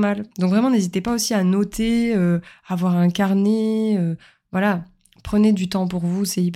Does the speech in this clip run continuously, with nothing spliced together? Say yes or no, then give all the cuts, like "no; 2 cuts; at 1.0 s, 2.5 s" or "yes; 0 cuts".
yes; 0 cuts